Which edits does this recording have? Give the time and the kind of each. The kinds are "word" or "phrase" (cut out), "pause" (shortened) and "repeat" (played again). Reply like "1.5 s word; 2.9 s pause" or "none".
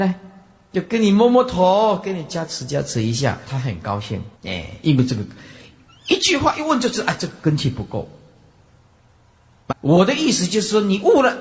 3.5 s word; 4.3 s pause; 9.7 s word